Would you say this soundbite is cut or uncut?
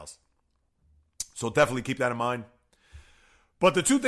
uncut